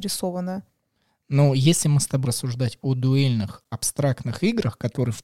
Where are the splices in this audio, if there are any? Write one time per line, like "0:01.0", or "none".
0:02.2

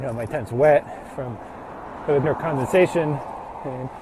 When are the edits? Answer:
0:02.2

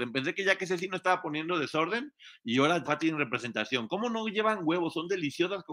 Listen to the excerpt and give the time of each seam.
0:02.9

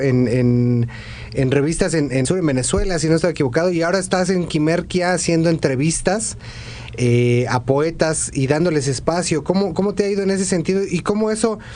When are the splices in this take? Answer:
0:02.2

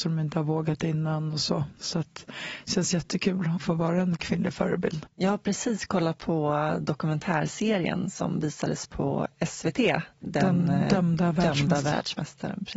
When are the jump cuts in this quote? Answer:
0:05.1

